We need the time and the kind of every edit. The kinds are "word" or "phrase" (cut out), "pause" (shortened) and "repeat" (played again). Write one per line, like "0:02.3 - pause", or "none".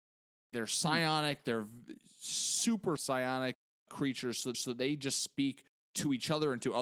0:03.0 - word
0:03.7 - pause
0:04.5 - repeat
0:05.7 - pause